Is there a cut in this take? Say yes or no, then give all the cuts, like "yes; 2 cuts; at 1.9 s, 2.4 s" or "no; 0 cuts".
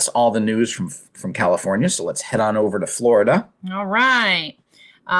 no; 0 cuts